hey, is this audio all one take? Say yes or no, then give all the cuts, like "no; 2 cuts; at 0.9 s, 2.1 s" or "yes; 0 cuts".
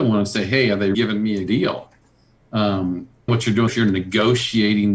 no; 4 cuts; at 0.9 s, 1.5 s, 3.3 s, 3.7 s